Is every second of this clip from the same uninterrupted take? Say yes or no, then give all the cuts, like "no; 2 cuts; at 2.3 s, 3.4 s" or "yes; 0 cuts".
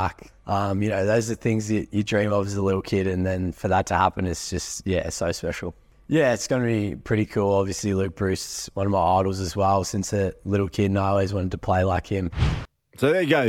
yes; 0 cuts